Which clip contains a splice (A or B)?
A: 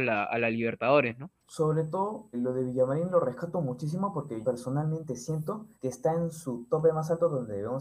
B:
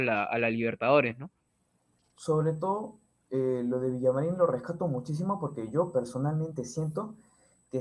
A